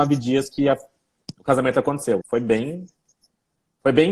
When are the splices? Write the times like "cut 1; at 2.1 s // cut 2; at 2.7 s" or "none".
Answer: cut 1; at 2.2 s